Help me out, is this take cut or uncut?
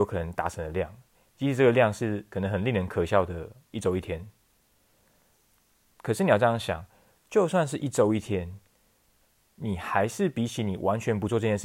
uncut